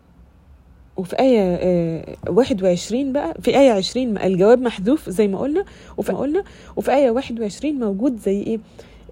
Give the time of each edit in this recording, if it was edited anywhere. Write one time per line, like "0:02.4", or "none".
0:03.4
0:06.1